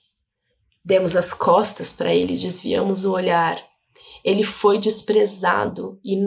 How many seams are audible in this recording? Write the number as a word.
zero